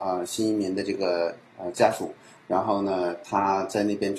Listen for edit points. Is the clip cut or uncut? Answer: uncut